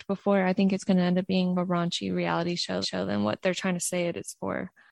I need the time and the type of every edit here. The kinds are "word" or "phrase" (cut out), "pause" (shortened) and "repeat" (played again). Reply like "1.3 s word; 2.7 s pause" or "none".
1.5 s phrase; 2.8 s repeat

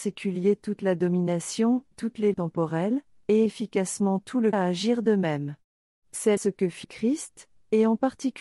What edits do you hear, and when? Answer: 1.9 s word; 2.3 s word; 3.5 s word; 4.5 s word; 6.4 s word; 6.8 s word

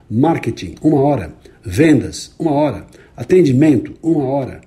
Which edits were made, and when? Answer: none

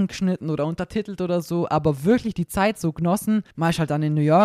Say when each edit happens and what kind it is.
3.5 s pause

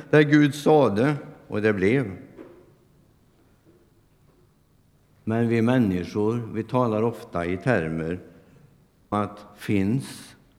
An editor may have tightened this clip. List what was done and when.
9.1 s word

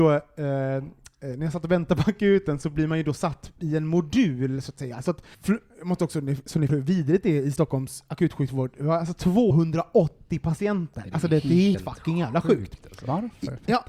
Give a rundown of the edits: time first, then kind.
5.3 s pause; 6.7 s word; 9.5 s phrase; 11.7 s word

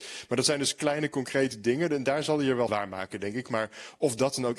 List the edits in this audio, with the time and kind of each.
2.7 s phrase

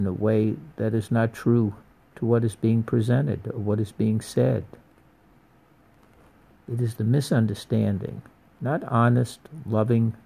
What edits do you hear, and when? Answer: 2.0 s pause; 8.5 s word

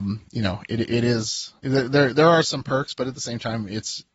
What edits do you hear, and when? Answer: 1.6 s pause

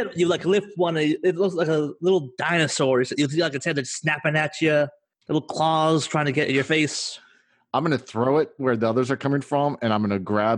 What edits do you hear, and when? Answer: none

